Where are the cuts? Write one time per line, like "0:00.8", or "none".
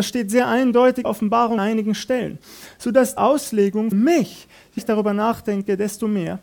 0:01.0
0:01.6
0:03.2
0:03.9
0:04.8